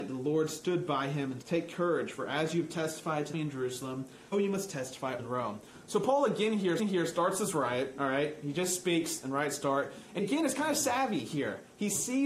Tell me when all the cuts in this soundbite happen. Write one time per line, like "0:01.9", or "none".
0:01.4
0:03.3
0:04.3
0:05.2
0:06.8
0:10.2